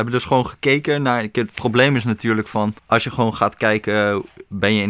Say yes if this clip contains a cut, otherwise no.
yes